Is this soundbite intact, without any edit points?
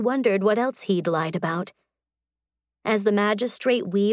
yes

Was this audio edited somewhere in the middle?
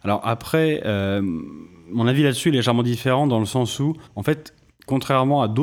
yes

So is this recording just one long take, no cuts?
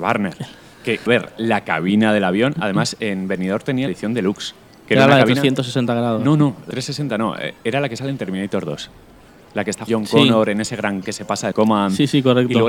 no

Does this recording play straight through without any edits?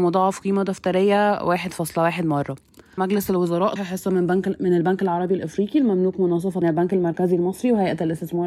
no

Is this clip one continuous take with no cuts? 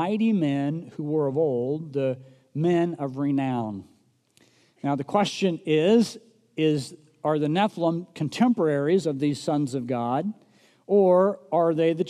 yes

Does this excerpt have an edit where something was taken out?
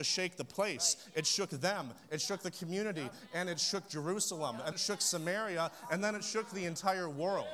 yes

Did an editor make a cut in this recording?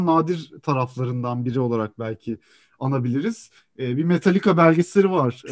no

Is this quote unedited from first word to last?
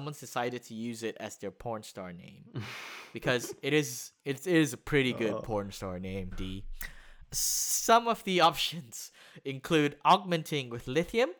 no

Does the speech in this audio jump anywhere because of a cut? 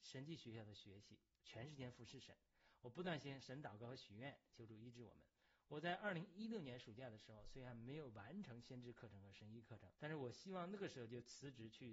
yes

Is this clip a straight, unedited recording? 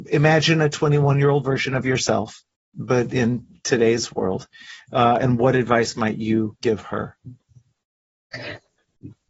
yes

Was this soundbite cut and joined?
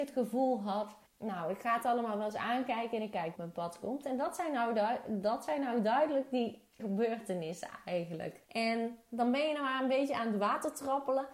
yes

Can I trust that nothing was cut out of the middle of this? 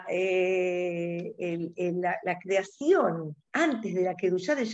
no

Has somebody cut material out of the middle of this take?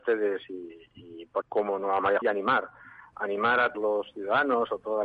yes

